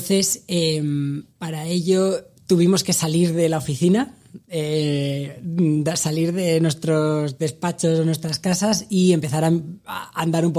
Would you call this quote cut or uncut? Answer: cut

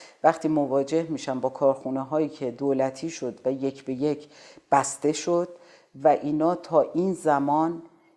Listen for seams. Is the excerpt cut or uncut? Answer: uncut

